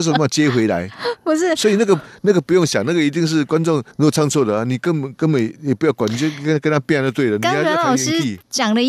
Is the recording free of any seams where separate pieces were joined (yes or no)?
no